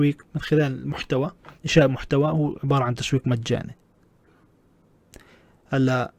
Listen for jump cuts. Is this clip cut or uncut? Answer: cut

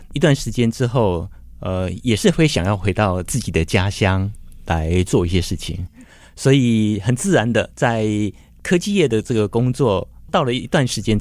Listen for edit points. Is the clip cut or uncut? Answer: uncut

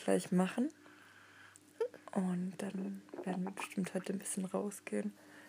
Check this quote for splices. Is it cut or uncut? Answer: uncut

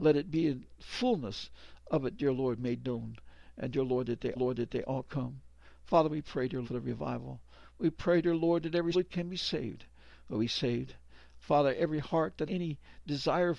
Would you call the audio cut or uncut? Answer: cut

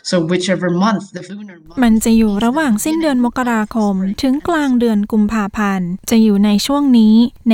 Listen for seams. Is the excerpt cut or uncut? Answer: cut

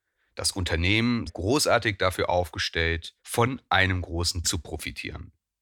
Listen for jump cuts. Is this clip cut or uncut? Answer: cut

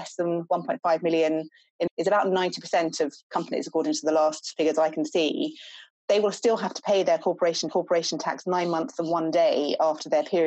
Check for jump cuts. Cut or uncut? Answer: cut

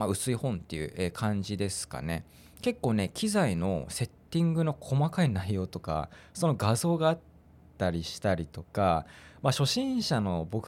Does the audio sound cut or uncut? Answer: uncut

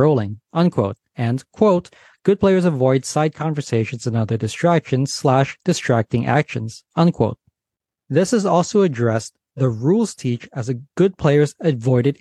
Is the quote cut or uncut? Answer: uncut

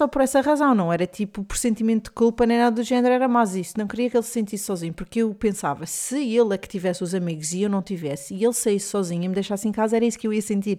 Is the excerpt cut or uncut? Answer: uncut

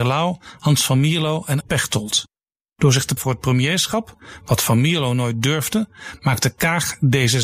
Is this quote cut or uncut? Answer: cut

